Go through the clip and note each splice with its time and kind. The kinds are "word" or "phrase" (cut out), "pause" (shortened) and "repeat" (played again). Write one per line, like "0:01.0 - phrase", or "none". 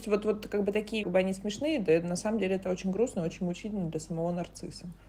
0:01.0 - phrase